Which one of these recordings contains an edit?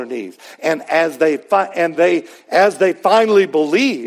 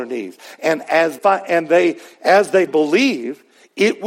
second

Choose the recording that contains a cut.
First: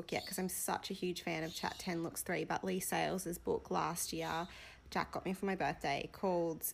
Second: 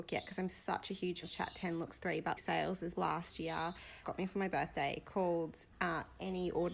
second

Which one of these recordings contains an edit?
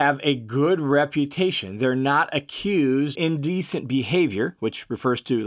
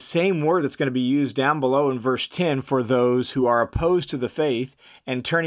first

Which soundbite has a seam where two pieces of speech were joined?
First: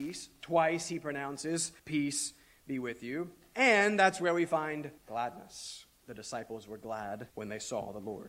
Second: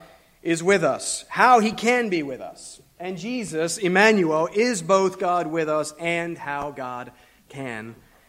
first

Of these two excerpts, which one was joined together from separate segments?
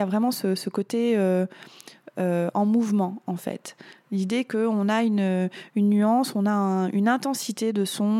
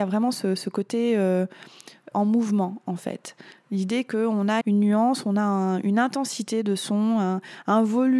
second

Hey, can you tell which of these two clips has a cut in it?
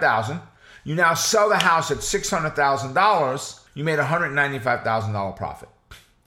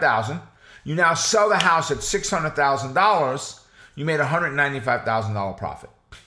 first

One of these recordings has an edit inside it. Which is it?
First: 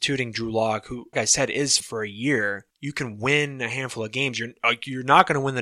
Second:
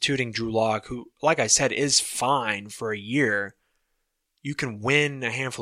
first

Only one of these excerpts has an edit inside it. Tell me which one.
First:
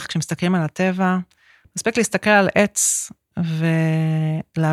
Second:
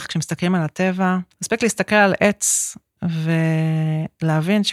second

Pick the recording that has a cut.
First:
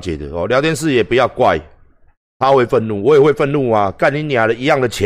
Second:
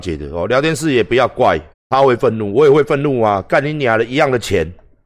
second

